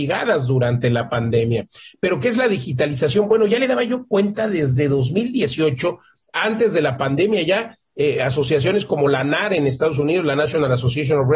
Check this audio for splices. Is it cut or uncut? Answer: uncut